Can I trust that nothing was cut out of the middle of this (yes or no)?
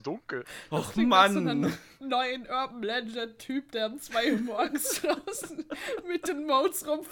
no